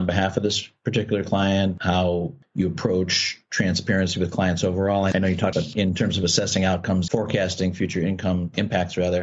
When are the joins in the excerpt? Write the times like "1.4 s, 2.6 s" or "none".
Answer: 5.5 s, 7.1 s